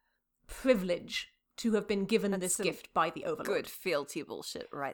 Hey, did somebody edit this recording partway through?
no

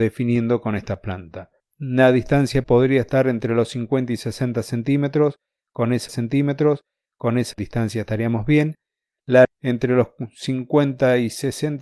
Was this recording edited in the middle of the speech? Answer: yes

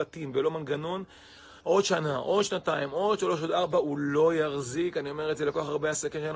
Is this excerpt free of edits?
no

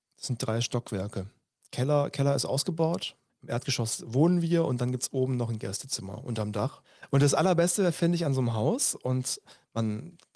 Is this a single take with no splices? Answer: yes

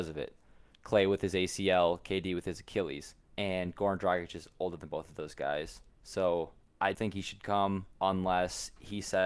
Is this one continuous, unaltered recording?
no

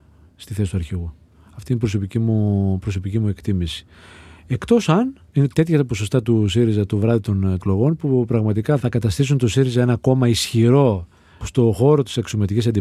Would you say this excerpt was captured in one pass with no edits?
yes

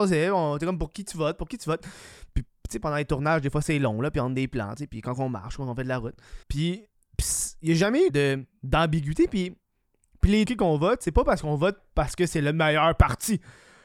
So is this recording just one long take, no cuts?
no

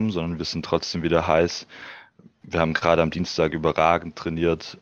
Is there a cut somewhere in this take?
no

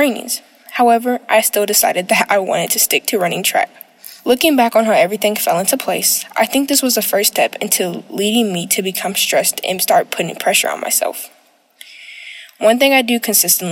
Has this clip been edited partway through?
no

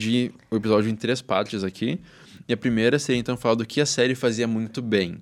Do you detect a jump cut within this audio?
no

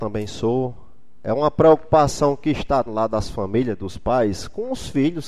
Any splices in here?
yes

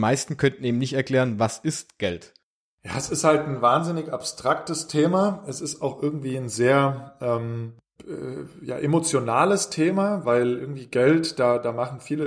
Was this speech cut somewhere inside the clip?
no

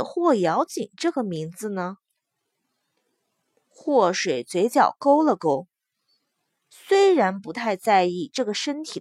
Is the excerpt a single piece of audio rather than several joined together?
yes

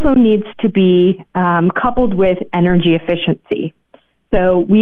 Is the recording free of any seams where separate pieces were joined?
yes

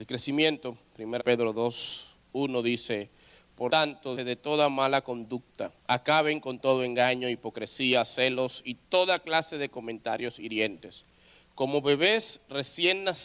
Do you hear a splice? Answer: yes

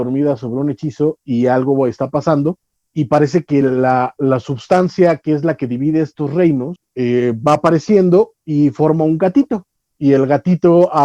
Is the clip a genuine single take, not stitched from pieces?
yes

